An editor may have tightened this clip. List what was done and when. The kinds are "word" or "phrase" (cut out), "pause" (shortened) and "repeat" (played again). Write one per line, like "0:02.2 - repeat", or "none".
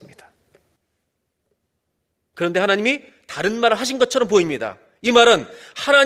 none